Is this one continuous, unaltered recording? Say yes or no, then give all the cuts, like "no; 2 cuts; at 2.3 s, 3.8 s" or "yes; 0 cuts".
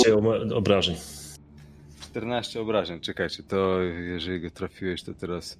yes; 0 cuts